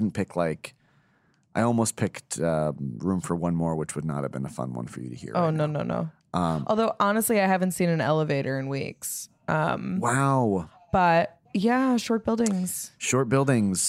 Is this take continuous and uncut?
no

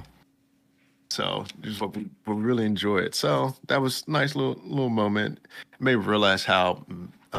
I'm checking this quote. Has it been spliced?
yes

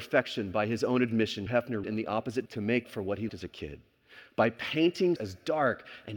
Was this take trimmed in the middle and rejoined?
yes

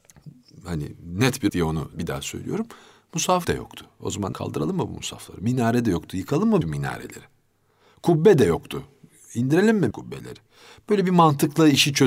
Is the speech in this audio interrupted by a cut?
yes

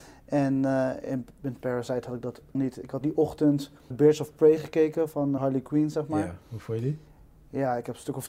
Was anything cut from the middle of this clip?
yes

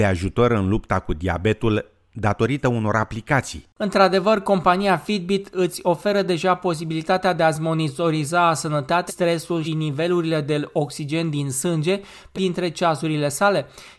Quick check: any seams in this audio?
yes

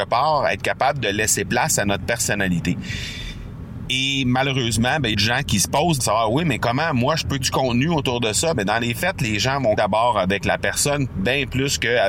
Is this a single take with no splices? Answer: no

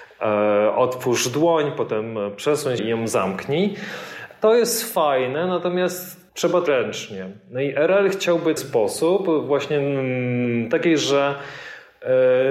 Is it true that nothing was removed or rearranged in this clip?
no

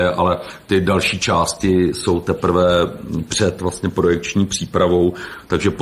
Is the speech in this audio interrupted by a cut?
no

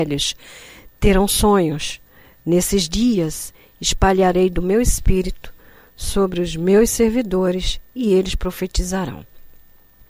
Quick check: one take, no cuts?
yes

